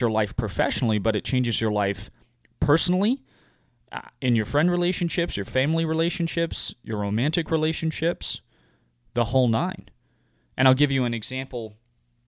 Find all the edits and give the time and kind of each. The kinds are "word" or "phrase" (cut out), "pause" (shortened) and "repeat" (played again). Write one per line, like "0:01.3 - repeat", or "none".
none